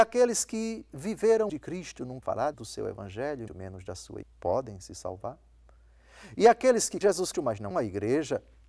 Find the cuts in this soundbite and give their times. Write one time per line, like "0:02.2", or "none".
0:01.5
0:02.2
0:02.5
0:03.5
0:04.2
0:07.0
0:07.3
0:07.7